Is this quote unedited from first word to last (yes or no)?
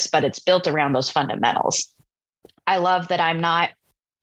yes